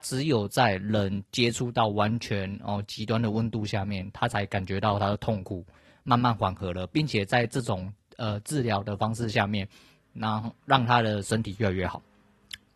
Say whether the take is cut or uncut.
uncut